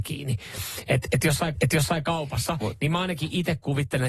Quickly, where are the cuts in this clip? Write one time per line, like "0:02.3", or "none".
0:01.6